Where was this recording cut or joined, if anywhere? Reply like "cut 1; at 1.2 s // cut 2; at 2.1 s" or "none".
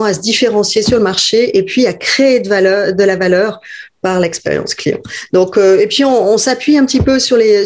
none

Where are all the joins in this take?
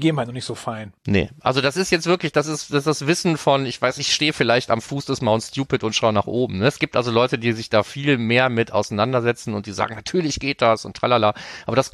cut 1; at 1.0 s

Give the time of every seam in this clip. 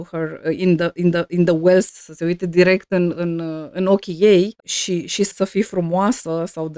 cut 1; at 1.1 s // cut 2; at 1.9 s // cut 3; at 4.5 s // cut 4; at 5.3 s

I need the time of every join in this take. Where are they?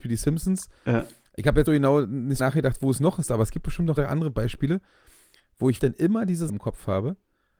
cut 1; at 1.7 s // cut 2; at 2.4 s // cut 3; at 4.0 s // cut 4; at 5.8 s // cut 5; at 6.5 s

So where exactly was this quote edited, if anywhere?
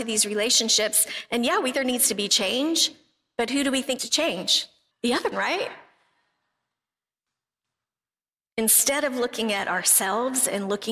cut 1; at 1.7 s // cut 2; at 4.0 s // cut 3; at 4.9 s // cut 4; at 5.3 s

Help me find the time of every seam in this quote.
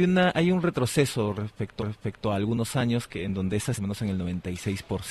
cut 1; at 1.8 s // cut 2; at 3.8 s

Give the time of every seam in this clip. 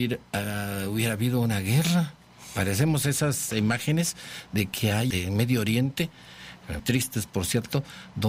cut 1; at 5.1 s // cut 2; at 6.8 s

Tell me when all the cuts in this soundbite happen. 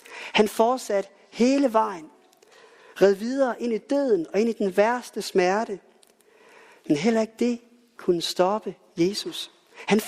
none

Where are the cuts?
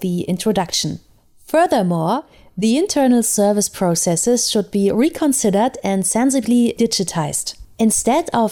none

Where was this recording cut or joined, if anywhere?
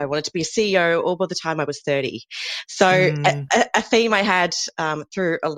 none

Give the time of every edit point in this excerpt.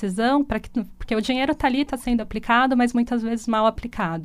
none

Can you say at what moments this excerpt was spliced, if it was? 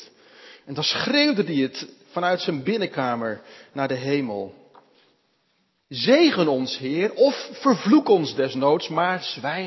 none

